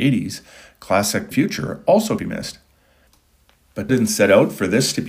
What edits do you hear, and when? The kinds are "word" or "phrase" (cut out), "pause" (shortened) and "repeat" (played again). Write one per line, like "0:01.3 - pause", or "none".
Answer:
0:01.3 - phrase
0:02.2 - word
0:03.9 - word